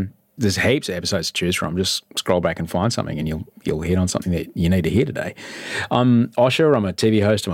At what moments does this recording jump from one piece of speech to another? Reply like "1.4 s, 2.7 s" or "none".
none

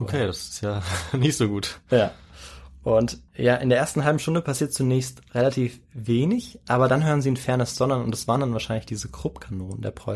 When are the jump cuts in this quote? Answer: 3.3 s

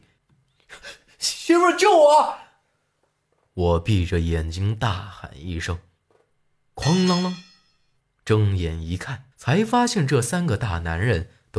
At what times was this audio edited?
9.3 s

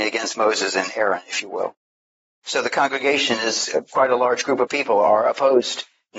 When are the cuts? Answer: none

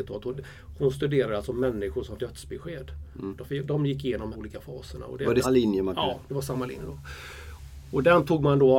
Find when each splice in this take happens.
2.2 s, 4.3 s, 5.4 s

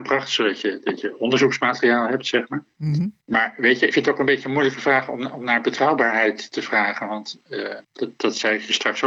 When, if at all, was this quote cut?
3.2 s, 3.9 s, 7.8 s

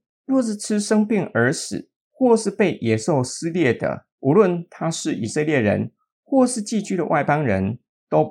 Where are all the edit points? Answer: 4.1 s

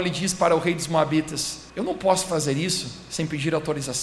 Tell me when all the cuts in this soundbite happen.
1.7 s

